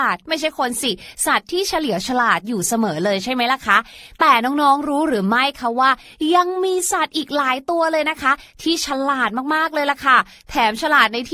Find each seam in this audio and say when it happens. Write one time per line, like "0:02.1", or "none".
none